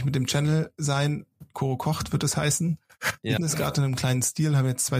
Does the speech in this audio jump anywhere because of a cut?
yes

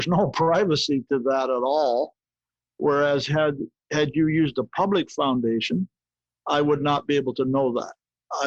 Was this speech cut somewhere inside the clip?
no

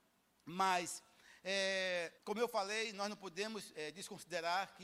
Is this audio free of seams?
no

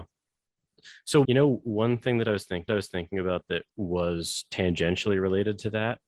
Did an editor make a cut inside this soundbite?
yes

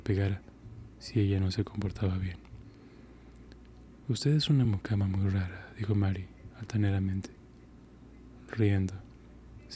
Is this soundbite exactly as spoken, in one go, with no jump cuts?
yes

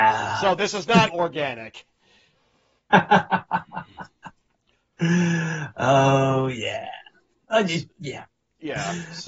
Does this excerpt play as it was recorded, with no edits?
no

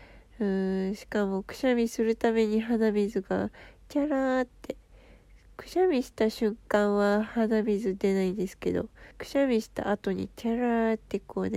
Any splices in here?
yes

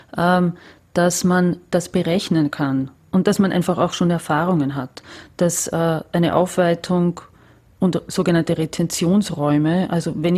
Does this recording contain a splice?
no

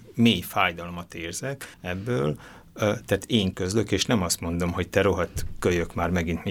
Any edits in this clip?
yes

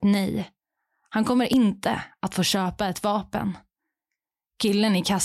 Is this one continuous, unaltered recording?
yes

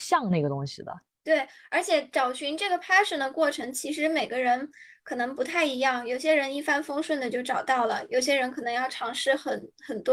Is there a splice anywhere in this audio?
no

